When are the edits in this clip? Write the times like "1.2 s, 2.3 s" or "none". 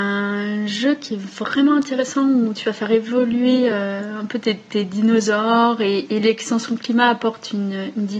none